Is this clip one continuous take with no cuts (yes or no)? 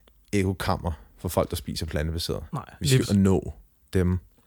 no